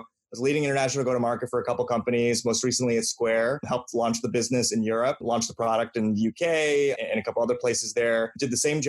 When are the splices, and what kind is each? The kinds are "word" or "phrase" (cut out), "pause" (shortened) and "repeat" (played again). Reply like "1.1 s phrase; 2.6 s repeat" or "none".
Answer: none